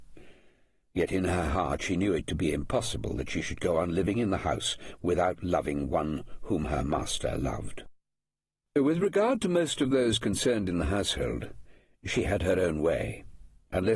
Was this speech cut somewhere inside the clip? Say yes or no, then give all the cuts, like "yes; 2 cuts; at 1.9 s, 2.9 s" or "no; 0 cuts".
no; 0 cuts